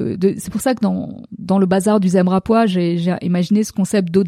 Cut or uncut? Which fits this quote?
uncut